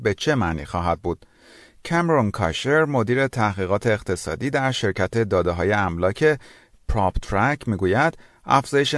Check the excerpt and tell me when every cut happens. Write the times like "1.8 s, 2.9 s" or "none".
none